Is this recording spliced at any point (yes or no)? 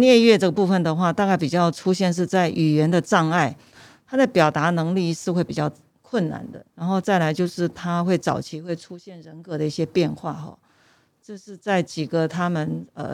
yes